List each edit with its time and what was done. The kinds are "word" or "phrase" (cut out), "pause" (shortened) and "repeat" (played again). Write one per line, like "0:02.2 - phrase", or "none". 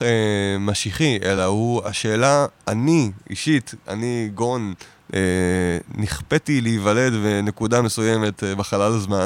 none

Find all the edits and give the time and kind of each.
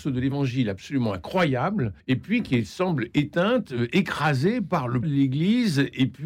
0:02.0 - pause
0:03.1 - word
0:05.0 - word

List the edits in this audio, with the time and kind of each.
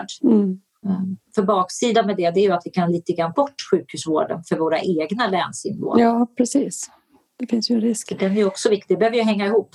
0:03.3 - word

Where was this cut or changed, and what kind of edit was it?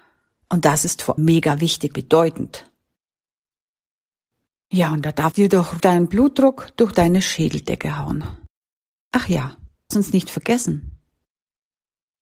0:01.2 - word
0:01.9 - word
0:05.3 - word
0:05.8 - word
0:09.9 - word

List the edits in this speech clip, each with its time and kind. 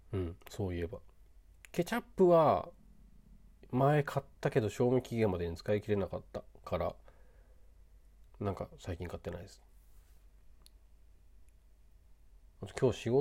0:08.3 - pause

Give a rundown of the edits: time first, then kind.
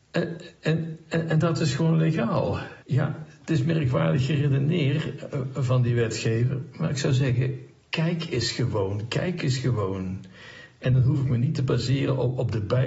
0:02.8 - pause

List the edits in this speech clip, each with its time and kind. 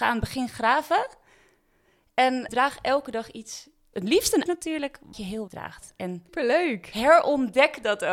0:02.5 - word
0:03.9 - word
0:04.5 - word
0:05.1 - word
0:05.5 - word
0:06.3 - word

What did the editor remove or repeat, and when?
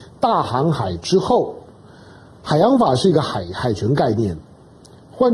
none

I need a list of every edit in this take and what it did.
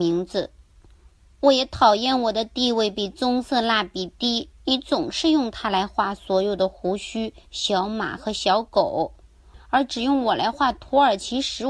0:04.6 - pause

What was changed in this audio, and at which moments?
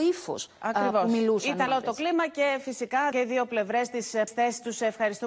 0:01.7 - word
0:03.1 - word
0:04.3 - word

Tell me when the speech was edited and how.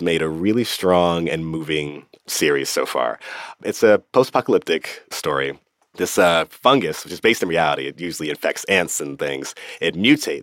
none

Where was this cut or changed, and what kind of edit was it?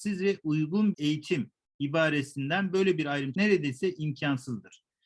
0:00.9 - word
0:03.3 - word

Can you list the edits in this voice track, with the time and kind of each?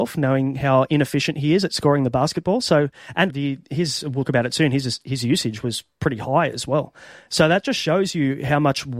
0:03.3 - word
0:04.2 - word

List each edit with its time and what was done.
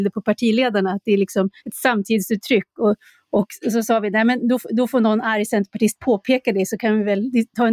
0:01.6 - pause

